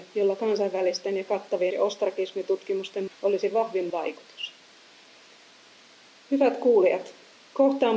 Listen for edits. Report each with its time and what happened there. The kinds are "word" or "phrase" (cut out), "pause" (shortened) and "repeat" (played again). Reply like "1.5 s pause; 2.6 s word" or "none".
1.7 s word; 3.1 s word; 3.9 s word